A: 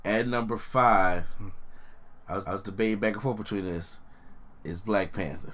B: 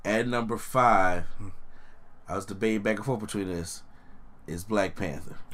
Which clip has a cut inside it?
A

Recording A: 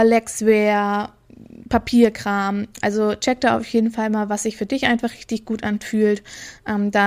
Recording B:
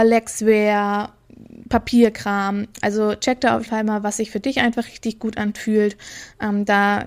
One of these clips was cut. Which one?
B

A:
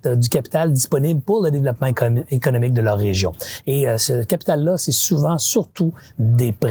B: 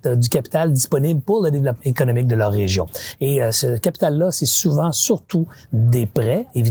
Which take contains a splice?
B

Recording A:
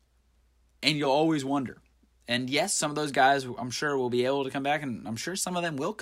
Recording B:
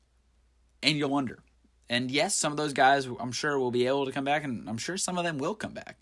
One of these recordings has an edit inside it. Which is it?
B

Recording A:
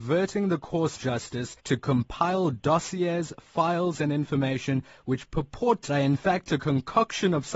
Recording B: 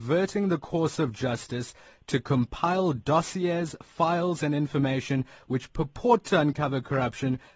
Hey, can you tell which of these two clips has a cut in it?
A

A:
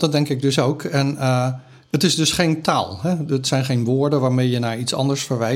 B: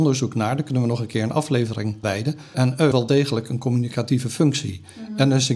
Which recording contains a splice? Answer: B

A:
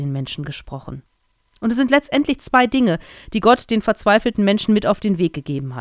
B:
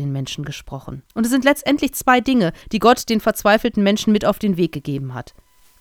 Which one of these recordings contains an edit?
B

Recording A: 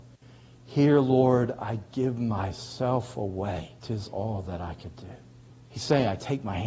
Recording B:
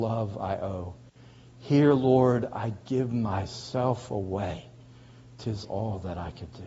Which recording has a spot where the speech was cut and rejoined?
A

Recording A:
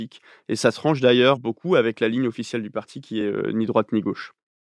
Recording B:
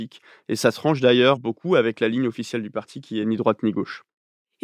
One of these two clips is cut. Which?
B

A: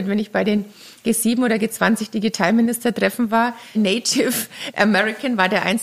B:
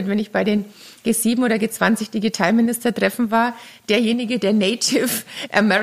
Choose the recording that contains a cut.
A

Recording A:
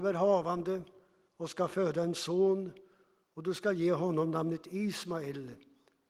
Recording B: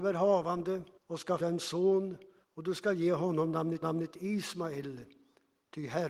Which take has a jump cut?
B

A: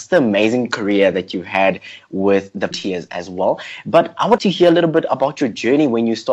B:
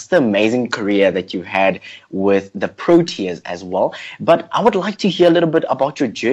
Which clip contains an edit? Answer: A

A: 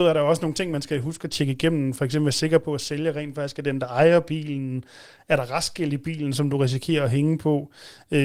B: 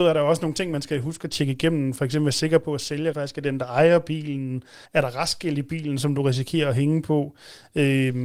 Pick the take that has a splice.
B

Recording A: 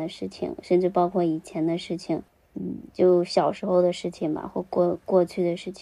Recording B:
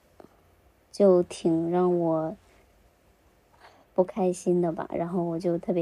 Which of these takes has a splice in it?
A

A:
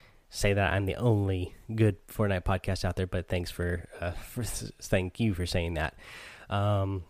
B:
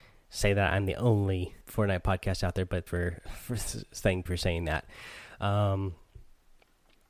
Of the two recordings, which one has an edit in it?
B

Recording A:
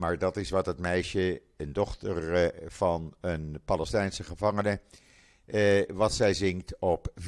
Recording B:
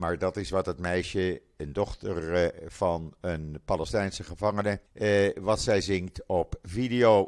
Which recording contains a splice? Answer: B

